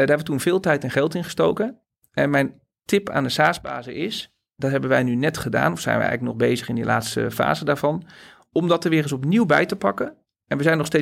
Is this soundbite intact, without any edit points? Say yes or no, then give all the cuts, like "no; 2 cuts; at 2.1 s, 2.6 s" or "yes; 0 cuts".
yes; 0 cuts